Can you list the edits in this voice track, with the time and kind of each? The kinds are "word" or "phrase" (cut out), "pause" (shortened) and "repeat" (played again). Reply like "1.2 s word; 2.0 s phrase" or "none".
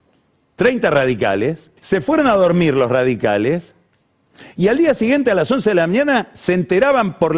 1.8 s pause

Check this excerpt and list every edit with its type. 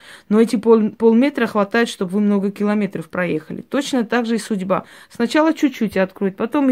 none

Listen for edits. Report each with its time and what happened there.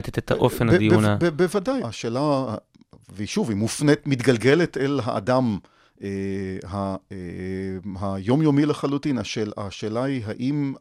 1.8 s word

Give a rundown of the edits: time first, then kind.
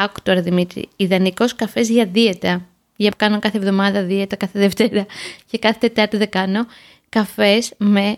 3.1 s word

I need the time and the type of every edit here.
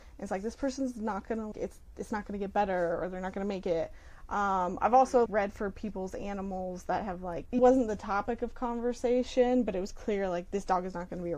1.5 s word; 5.3 s word; 7.6 s phrase

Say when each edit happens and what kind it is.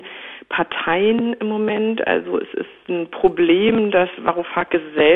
none

